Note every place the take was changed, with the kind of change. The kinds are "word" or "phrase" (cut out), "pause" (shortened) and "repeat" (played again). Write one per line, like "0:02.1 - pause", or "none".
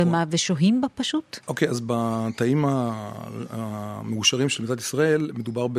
none